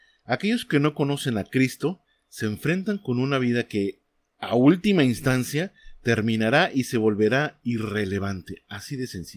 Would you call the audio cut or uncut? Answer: uncut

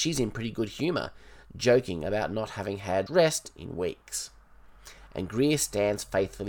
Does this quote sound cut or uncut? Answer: cut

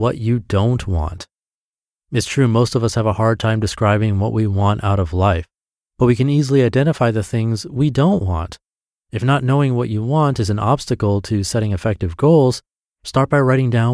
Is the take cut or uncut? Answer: uncut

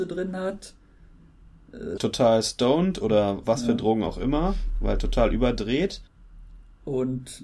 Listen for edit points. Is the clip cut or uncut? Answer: cut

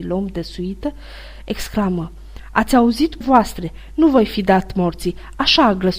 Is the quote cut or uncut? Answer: cut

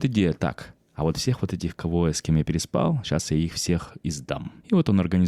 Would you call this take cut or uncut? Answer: uncut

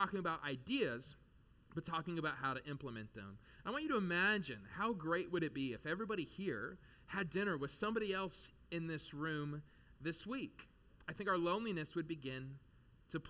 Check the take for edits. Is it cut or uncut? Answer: uncut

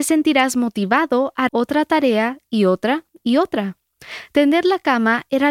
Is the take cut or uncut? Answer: cut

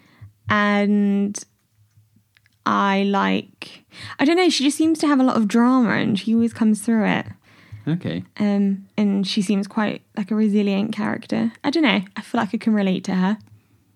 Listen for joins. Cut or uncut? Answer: uncut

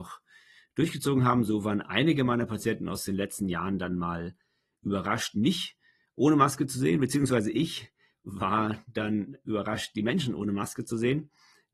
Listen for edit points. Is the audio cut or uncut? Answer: uncut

